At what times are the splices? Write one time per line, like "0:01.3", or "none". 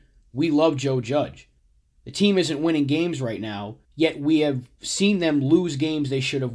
0:01.6
0:03.8